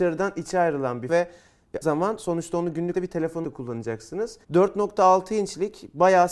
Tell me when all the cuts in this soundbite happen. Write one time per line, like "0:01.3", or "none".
0:01.1
0:01.8
0:02.9
0:03.4
0:04.4